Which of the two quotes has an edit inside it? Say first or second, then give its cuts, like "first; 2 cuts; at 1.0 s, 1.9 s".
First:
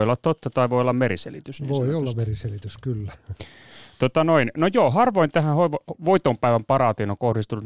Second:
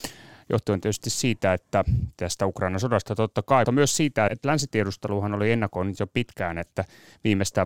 second; 2 cuts; at 3.6 s, 4.3 s